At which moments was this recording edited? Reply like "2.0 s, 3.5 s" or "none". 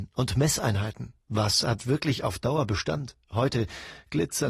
1.2 s, 3.2 s